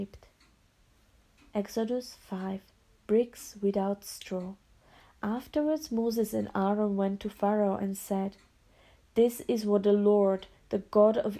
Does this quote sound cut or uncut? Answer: uncut